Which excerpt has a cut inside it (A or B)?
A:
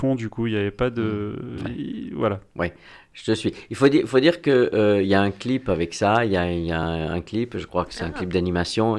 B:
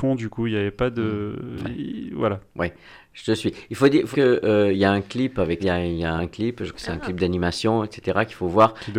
B